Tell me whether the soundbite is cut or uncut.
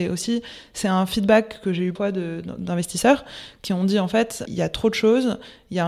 cut